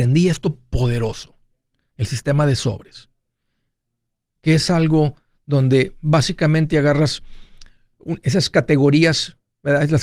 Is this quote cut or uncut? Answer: uncut